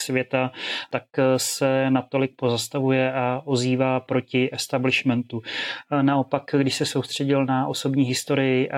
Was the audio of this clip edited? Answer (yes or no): no